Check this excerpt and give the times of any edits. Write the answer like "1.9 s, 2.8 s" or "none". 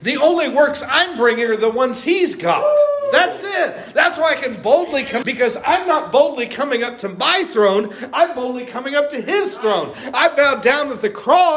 5.2 s